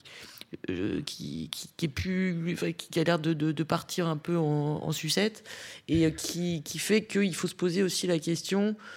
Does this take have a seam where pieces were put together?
no; 0 cuts

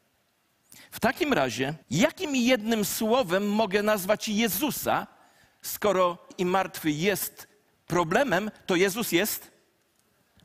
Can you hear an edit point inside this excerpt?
yes; 2 cuts; at 1.8 s, 6.3 s

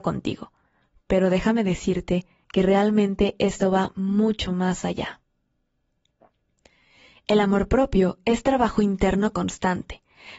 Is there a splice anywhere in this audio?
no; 0 cuts

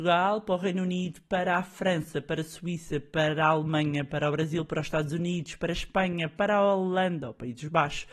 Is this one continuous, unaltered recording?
yes; 0 cuts

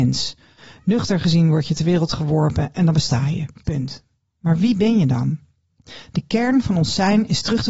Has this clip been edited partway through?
no; 0 cuts

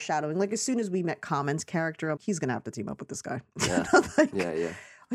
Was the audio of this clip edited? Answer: yes; 1 cut; at 2.2 s

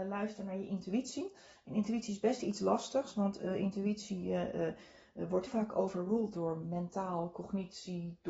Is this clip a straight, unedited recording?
no; 2 cuts; at 5.5 s, 6.3 s

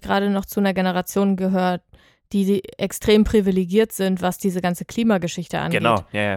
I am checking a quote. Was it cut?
no; 0 cuts

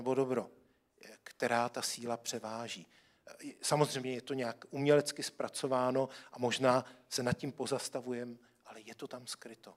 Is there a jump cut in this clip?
no; 0 cuts

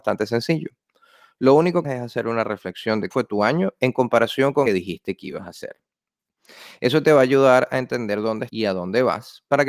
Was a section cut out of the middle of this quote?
yes; 4 cuts; at 1.8 s, 3.1 s, 4.7 s, 8.5 s

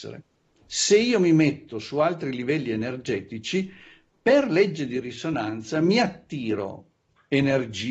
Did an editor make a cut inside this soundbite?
no; 0 cuts

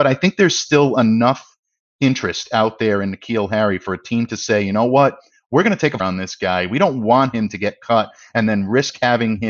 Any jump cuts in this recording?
yes; 1 cut; at 6.0 s

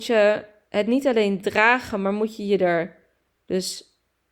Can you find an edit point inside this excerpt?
no; 0 cuts

